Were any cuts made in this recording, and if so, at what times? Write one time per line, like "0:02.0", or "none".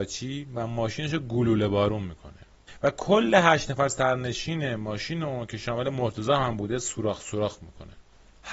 none